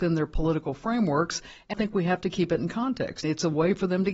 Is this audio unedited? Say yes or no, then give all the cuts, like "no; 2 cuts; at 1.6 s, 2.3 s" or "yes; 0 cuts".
no; 2 cuts; at 1.7 s, 3.2 s